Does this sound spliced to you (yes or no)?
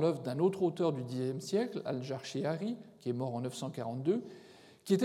no